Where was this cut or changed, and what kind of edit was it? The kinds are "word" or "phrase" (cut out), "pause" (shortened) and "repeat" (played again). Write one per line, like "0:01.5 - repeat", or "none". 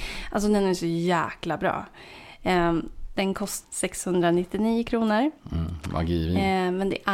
0:03.6 - word